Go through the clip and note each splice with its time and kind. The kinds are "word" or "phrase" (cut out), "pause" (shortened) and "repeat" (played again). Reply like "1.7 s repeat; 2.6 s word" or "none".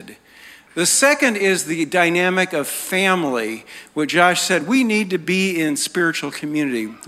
none